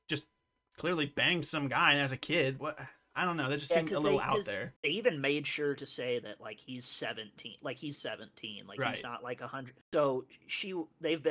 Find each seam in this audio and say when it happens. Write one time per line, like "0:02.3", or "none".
0:02.6
0:04.8
0:07.9
0:09.8